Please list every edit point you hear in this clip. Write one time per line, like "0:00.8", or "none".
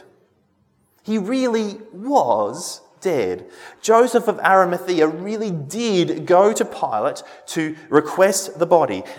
none